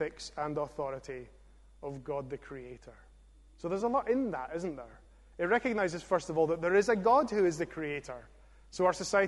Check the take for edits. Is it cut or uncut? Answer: uncut